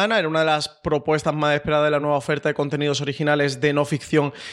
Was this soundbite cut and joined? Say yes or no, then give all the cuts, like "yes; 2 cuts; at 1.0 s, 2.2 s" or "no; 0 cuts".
no; 0 cuts